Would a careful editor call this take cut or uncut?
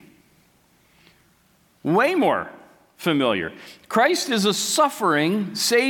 uncut